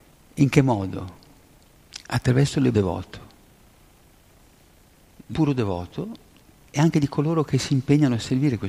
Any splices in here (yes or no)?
yes